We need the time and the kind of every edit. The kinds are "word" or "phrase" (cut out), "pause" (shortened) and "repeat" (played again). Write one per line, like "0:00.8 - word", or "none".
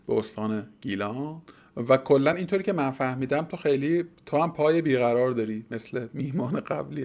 none